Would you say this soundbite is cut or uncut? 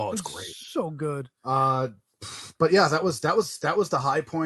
cut